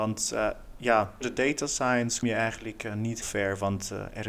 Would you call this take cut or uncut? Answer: cut